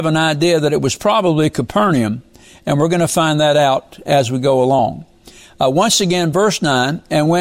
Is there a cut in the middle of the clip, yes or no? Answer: no